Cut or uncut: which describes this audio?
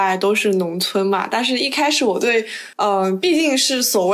cut